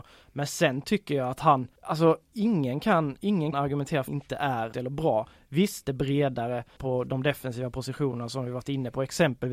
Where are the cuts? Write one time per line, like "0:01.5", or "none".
0:01.8
0:03.5
0:04.1
0:04.7
0:05.9
0:06.8